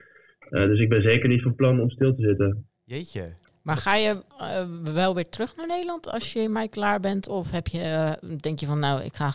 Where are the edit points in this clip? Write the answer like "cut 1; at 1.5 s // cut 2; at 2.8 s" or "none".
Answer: cut 1; at 2.7 s